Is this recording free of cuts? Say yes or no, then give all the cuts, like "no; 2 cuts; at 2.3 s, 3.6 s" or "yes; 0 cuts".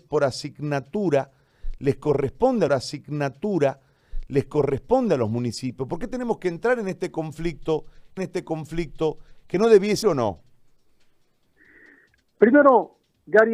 no; 3 cuts; at 2.7 s, 8.2 s, 10.0 s